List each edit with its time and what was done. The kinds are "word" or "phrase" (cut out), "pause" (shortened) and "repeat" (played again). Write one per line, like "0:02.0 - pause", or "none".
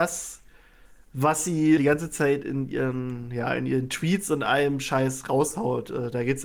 0:01.8 - word